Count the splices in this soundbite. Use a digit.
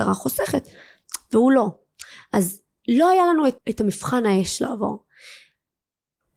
1